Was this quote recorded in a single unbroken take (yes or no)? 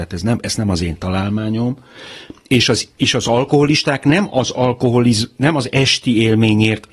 yes